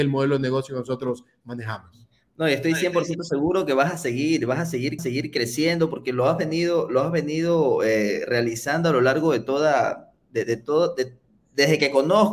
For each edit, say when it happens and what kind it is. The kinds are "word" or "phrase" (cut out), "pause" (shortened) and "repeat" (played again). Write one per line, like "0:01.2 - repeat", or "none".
0:05.0 - repeat